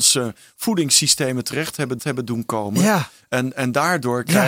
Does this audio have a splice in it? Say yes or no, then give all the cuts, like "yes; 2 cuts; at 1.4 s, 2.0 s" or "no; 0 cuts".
yes; 1 cut; at 2.0 s